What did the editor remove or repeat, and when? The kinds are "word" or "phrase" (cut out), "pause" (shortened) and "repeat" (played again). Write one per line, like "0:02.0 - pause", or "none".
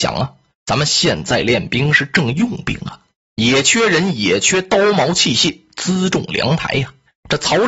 none